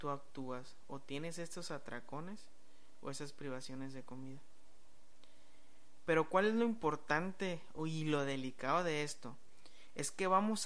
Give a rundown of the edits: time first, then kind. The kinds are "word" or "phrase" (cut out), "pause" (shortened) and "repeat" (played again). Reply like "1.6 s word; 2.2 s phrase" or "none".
none